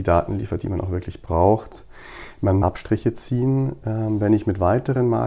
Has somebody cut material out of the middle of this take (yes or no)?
yes